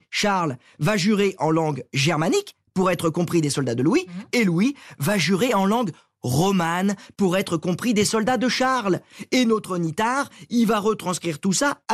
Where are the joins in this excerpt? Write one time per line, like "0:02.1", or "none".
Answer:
none